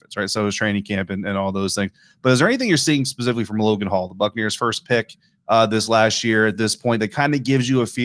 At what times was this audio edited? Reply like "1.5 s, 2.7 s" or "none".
none